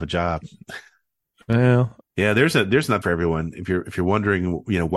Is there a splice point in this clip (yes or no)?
yes